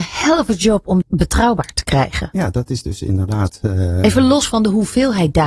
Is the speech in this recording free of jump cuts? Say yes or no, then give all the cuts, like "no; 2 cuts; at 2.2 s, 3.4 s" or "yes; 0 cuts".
no; 1 cut; at 1.0 s